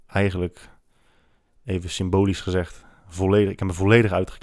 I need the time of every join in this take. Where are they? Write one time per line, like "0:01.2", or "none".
none